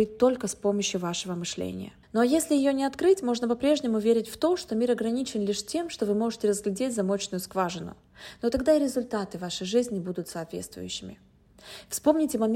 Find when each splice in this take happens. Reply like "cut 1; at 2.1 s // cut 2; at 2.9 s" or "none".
cut 1; at 2.0 s